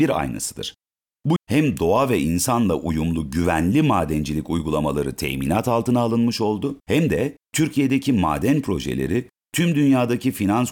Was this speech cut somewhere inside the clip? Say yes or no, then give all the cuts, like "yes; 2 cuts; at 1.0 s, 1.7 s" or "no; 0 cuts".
yes; 2 cuts; at 1.4 s, 6.8 s